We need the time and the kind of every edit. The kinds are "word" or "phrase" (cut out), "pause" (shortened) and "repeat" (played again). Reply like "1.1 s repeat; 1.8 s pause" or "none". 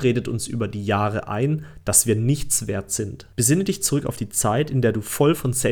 3.3 s pause